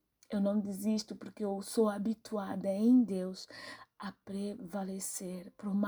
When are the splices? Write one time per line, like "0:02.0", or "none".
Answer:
none

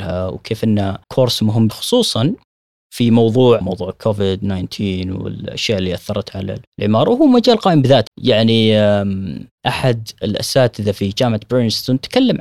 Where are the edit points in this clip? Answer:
0:01.0
0:01.7
0:02.5
0:03.6
0:06.7
0:08.1
0:09.5

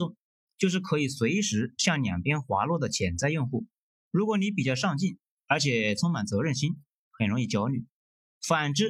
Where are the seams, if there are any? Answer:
none

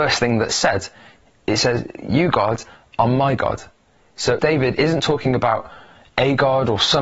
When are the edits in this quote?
0:04.4

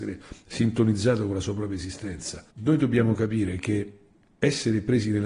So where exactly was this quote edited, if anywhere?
0:02.5

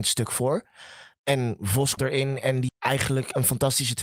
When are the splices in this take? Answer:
0:02.0
0:02.7

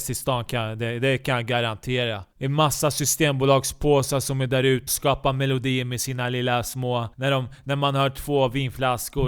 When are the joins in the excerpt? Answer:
0:02.3
0:04.9
0:07.1

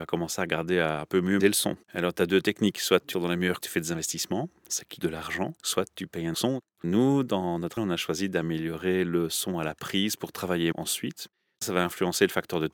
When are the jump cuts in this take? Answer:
0:01.4
0:01.8
0:03.1
0:03.6
0:05.0
0:05.6
0:06.3
0:07.8
0:10.7

